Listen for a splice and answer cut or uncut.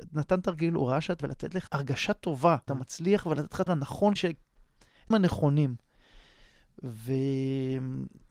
cut